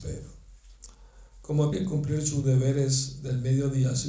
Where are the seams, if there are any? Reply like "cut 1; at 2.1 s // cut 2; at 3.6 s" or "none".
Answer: cut 1; at 1.7 s

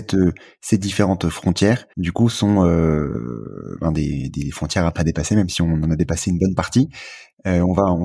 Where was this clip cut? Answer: cut 1; at 1.9 s

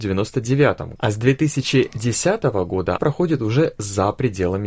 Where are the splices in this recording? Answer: cut 1; at 1.0 s // cut 2; at 3.0 s

